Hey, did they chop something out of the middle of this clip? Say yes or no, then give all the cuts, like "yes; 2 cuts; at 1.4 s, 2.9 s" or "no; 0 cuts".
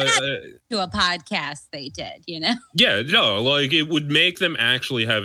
no; 0 cuts